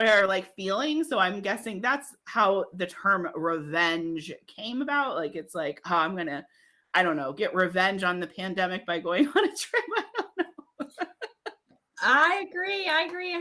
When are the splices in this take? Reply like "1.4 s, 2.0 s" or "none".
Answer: none